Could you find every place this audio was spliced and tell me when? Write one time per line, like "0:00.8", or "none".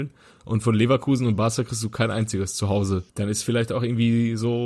0:03.1